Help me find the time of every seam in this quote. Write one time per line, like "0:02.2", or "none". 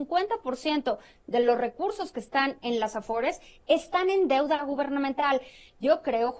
none